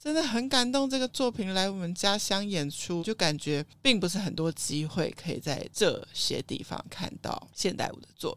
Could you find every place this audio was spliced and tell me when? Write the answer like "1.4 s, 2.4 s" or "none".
3.0 s